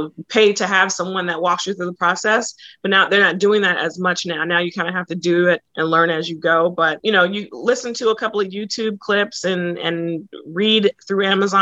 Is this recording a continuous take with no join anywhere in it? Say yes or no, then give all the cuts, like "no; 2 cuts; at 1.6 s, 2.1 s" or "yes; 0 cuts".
no; 1 cut; at 5.7 s